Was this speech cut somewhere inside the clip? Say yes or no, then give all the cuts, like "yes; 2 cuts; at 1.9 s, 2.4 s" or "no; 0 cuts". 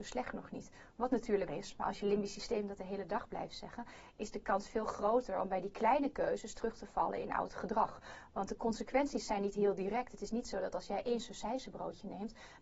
yes; 1 cut; at 1.5 s